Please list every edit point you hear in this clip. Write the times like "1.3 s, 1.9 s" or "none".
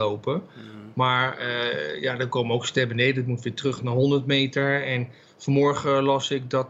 none